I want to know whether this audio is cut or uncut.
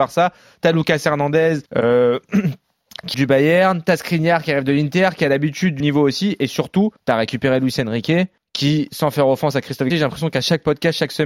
cut